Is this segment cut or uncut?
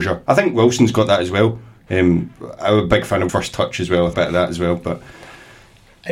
cut